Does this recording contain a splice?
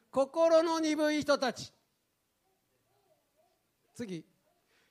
no; 0 cuts

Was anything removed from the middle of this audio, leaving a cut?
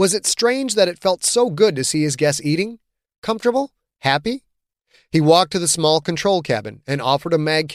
no; 0 cuts

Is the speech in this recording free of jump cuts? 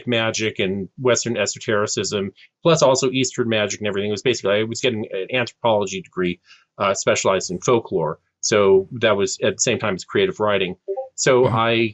yes; 0 cuts

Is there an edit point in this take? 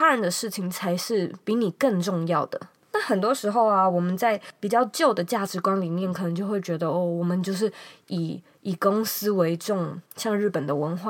yes; 1 cut; at 10.1 s

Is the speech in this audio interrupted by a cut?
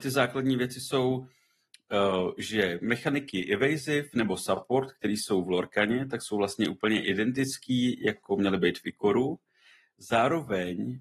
no; 0 cuts

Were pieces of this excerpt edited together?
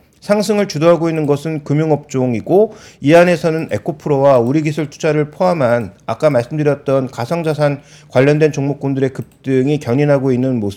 no; 0 cuts

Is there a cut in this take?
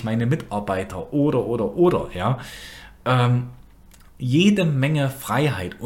yes; 1 cut; at 3.9 s

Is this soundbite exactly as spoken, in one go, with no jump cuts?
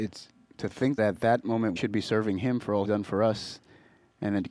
no; 3 cuts; at 1.0 s, 1.8 s, 2.8 s

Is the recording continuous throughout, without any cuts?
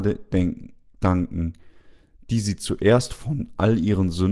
yes; 0 cuts

